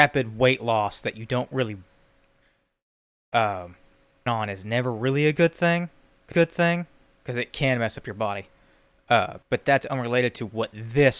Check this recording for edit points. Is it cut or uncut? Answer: cut